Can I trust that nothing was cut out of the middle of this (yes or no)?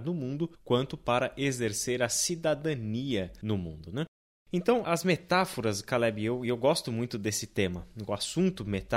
yes